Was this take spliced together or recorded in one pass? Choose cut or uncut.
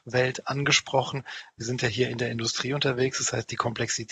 uncut